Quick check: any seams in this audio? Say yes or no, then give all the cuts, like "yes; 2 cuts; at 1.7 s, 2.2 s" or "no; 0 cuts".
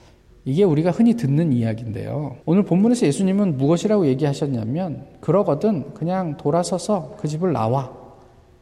yes; 1 cut; at 2.4 s